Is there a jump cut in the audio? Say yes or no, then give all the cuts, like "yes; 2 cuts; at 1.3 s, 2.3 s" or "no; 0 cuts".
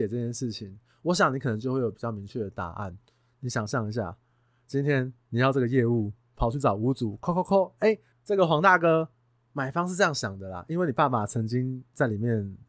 no; 0 cuts